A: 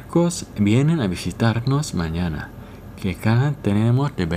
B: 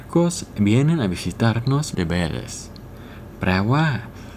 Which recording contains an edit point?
B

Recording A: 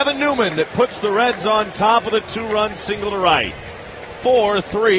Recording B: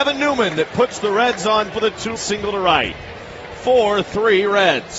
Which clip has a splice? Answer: B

